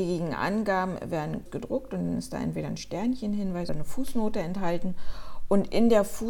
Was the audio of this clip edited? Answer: yes; 2 cuts; at 1.5 s, 3.7 s

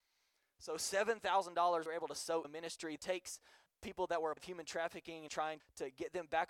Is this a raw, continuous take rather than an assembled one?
no; 7 cuts; at 1.9 s, 2.4 s, 3.0 s, 3.7 s, 4.4 s, 5.3 s, 5.6 s

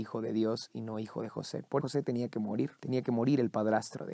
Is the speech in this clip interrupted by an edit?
yes; 2 cuts; at 1.8 s, 2.8 s

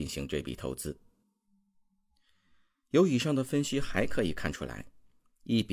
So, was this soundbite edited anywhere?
no; 0 cuts

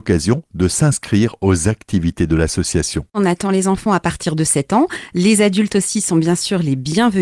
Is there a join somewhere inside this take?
no; 0 cuts

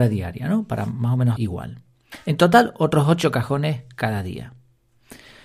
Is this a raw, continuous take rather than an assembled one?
no; 1 cut; at 1.4 s

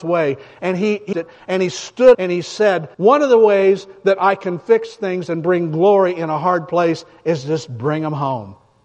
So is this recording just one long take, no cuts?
no; 3 cuts; at 1.1 s, 2.1 s, 2.9 s

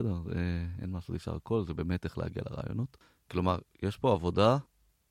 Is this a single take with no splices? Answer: yes; 0 cuts

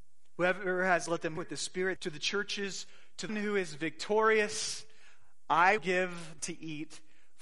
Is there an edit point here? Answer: yes; 6 cuts; at 1.1 s, 1.4 s, 2.0 s, 3.3 s, 5.8 s, 6.4 s

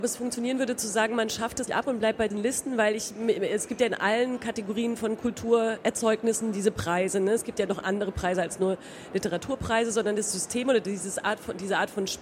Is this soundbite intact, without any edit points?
no; 2 cuts; at 1.7 s, 2.3 s

